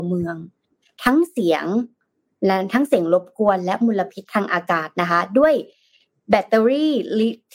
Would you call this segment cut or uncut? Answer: uncut